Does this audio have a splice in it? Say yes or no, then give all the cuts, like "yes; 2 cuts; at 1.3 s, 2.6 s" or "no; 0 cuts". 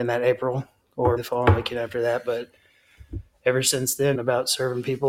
yes; 2 cuts; at 1.2 s, 4.1 s